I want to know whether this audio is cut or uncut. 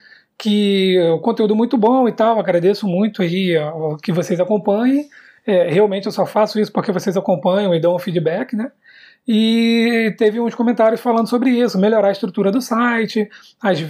uncut